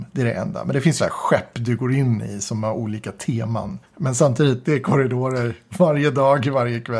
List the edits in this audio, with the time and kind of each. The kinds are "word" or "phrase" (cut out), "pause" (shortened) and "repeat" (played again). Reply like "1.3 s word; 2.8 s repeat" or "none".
1.0 s phrase; 3.8 s pause; 4.6 s word